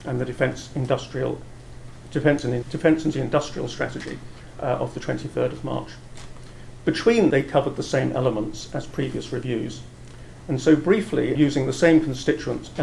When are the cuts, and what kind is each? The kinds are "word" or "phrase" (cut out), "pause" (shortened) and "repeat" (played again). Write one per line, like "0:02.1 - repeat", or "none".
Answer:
0:02.6 - word
0:03.1 - word
0:07.3 - word
0:11.4 - word